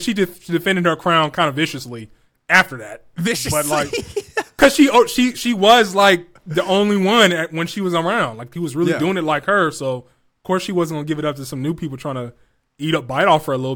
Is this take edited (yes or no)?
no